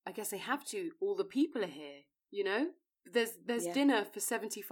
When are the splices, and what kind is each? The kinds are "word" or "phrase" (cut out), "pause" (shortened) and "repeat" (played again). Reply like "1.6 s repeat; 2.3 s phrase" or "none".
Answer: none